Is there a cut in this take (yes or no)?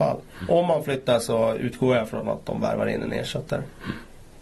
no